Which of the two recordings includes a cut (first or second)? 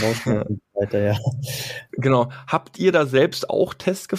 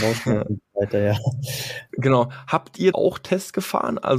second